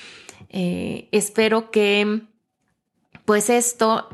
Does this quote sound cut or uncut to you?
uncut